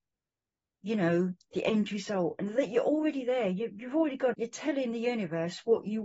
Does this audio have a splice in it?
yes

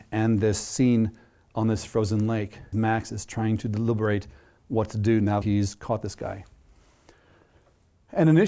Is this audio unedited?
no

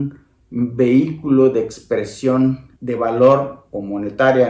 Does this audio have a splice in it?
yes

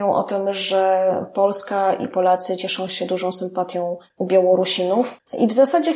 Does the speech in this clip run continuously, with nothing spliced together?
yes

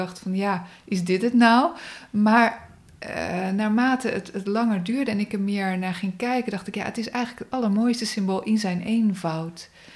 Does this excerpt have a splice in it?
no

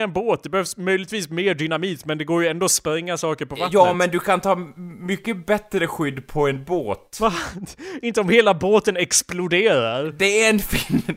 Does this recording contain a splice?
no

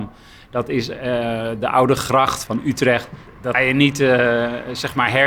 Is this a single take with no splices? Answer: no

